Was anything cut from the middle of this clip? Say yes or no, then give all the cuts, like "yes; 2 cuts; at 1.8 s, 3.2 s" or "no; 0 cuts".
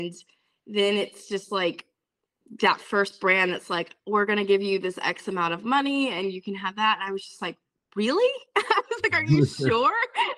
yes; 1 cut; at 4.0 s